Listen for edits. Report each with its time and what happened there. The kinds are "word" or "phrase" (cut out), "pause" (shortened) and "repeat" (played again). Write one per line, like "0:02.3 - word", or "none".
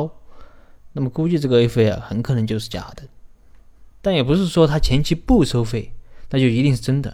0:03.9 - pause